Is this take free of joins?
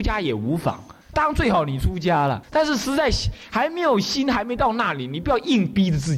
no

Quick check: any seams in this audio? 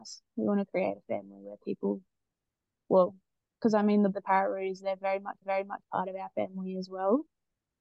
yes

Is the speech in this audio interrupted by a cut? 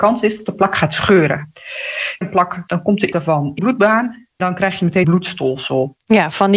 yes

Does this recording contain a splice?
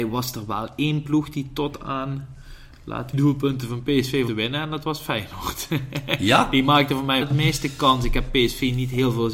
yes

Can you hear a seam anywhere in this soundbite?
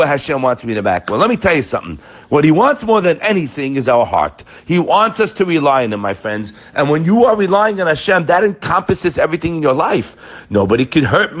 no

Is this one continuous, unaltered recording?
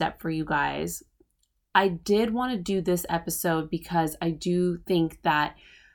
yes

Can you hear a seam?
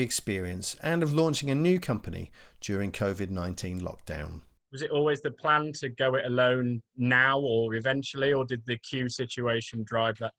no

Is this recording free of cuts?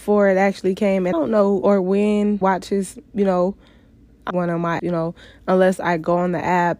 no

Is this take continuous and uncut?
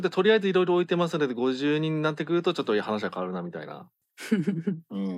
yes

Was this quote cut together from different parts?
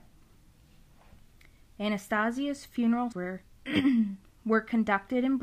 yes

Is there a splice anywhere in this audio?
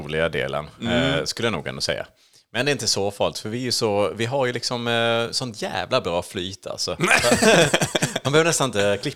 no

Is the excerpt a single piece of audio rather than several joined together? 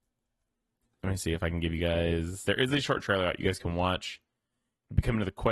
yes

